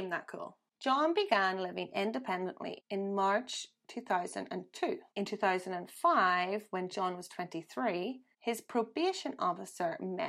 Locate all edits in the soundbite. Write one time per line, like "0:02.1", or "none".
0:05.1